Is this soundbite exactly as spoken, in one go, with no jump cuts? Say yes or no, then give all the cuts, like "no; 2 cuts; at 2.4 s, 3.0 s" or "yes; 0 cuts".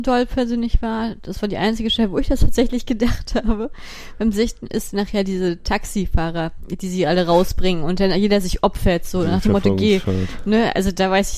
yes; 0 cuts